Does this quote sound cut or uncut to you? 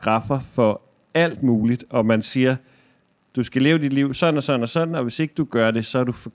uncut